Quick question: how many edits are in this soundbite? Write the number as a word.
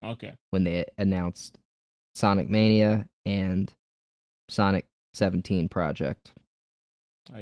zero